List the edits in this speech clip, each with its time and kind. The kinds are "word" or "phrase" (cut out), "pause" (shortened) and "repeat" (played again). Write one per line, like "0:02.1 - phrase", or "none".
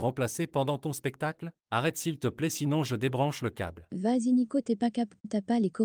none